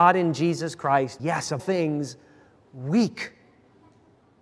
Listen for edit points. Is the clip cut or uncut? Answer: cut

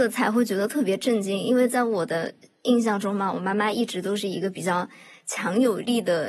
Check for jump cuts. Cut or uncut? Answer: uncut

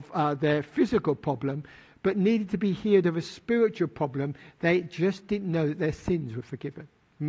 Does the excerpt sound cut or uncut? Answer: uncut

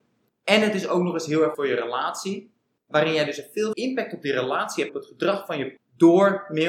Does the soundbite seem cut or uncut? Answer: cut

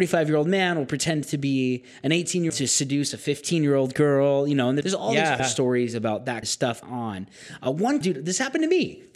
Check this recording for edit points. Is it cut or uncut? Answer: cut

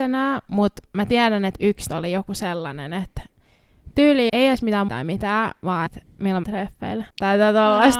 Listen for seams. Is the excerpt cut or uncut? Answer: cut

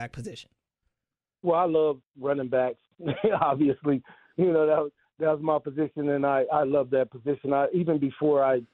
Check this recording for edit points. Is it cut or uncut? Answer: uncut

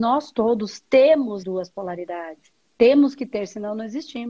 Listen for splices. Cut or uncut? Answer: cut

